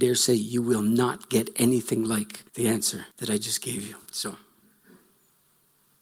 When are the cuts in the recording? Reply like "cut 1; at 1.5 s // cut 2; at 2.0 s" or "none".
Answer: cut 1; at 2.5 s // cut 2; at 3.1 s // cut 3; at 4.1 s